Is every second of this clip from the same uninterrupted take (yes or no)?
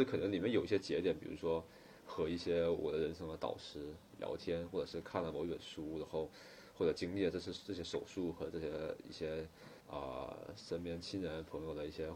no